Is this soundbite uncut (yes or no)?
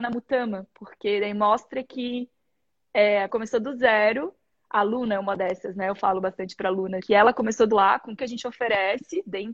no